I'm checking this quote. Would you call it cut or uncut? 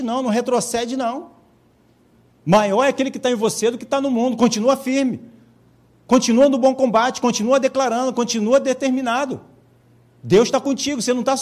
cut